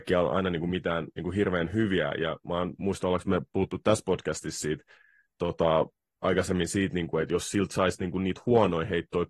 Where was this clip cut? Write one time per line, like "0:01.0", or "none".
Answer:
none